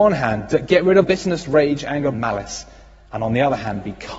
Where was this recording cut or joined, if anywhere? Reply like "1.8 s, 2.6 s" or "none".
1.0 s, 2.1 s